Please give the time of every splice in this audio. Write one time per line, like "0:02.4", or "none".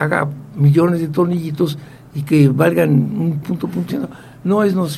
0:03.4
0:03.9

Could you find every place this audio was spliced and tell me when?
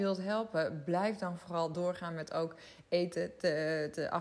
none

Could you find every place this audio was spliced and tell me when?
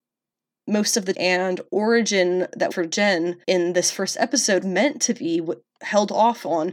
0:01.1
0:02.7
0:03.4
0:04.6

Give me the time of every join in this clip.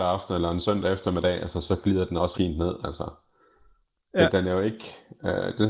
0:02.3

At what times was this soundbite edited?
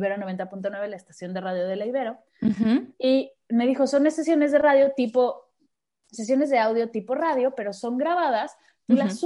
none

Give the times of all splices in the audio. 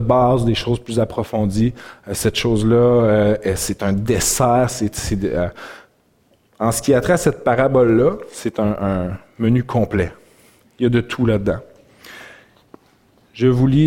none

